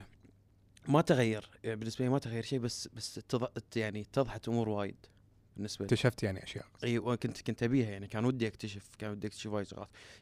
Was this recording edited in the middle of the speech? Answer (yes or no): no